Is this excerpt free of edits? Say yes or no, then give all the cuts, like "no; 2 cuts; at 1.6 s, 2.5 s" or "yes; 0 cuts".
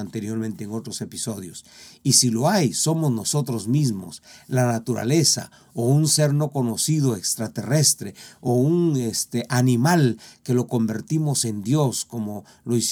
yes; 0 cuts